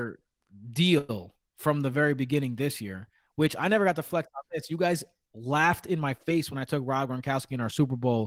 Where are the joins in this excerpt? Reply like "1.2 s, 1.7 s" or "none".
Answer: none